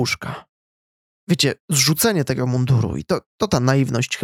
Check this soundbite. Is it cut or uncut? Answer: cut